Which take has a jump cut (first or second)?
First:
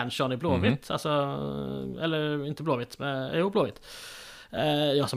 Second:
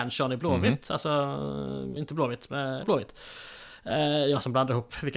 second